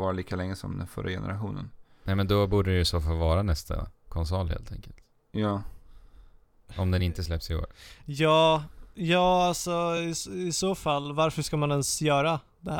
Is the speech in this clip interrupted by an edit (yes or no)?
no